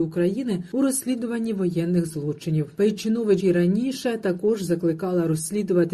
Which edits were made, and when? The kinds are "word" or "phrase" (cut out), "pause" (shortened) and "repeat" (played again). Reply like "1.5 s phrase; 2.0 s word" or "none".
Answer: 3.4 s word